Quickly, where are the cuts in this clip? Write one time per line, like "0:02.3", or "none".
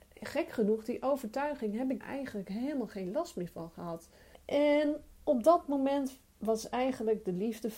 0:02.0
0:04.3
0:06.3